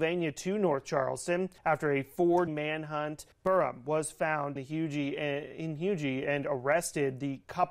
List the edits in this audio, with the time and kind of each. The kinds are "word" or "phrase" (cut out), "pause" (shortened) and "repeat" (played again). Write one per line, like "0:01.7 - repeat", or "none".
0:01.6 - pause
0:02.5 - word
0:03.3 - pause
0:04.6 - word